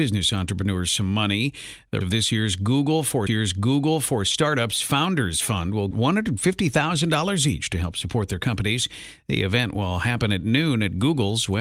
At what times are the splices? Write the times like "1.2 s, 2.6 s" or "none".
2.0 s, 3.3 s, 5.9 s